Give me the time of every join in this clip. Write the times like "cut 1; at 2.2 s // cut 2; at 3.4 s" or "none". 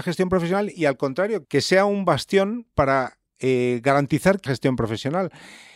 cut 1; at 1.4 s // cut 2; at 4.5 s